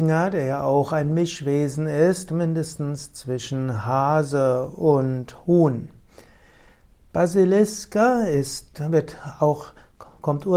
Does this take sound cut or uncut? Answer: uncut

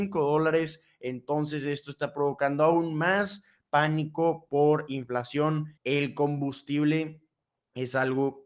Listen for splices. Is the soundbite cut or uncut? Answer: cut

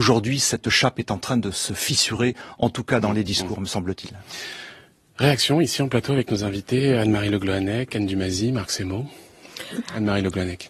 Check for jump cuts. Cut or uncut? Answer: uncut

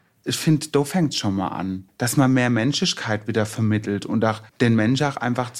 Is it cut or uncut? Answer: cut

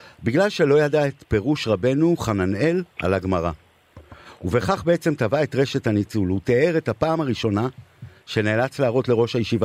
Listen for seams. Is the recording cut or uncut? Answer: cut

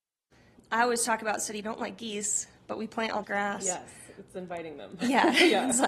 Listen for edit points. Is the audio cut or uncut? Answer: cut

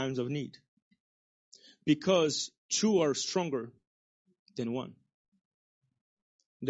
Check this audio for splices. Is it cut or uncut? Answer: uncut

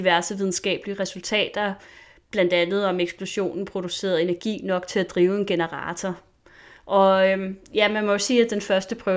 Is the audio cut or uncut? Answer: uncut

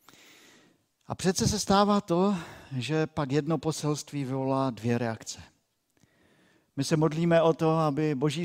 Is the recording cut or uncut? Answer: uncut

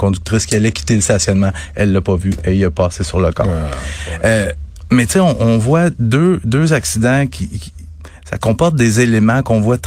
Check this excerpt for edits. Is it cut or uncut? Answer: uncut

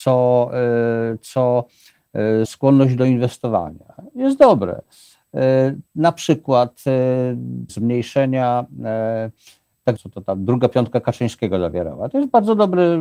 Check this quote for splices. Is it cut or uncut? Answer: cut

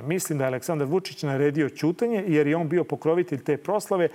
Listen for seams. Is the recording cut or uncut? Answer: uncut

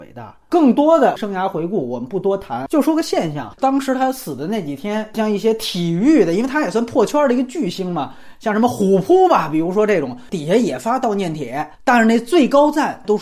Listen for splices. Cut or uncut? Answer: cut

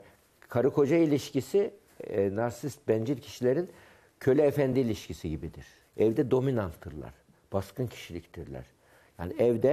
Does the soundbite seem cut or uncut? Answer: uncut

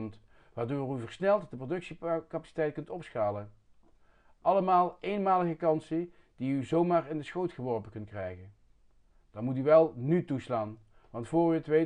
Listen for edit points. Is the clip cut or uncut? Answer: uncut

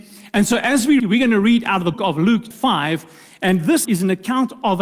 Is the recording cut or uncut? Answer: cut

